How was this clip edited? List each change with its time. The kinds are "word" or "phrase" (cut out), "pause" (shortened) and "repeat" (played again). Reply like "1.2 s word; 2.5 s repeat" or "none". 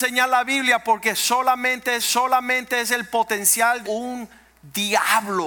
2.0 s repeat; 3.8 s phrase